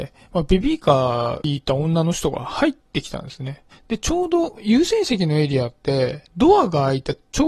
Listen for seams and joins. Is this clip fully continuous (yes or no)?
no